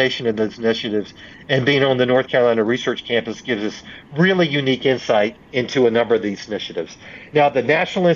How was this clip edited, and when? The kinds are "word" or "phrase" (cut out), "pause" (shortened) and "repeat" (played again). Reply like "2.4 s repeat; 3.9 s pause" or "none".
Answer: 5.4 s pause